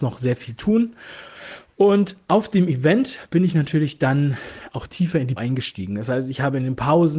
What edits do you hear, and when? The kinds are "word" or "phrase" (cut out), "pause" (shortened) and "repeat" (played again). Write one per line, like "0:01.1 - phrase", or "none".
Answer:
0:05.4 - word